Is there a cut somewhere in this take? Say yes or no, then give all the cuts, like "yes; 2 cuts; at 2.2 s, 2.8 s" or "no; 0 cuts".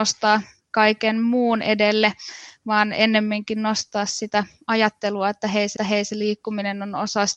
yes; 1 cut; at 5.8 s